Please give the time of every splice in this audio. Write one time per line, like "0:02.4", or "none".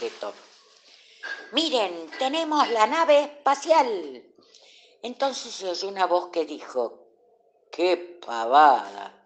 0:02.1